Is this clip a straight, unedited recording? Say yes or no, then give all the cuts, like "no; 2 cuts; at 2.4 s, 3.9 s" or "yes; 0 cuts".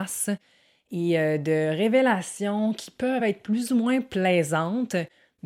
yes; 0 cuts